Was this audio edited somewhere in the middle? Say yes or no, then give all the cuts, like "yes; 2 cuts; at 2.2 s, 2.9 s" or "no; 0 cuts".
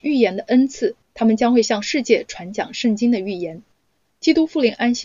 no; 0 cuts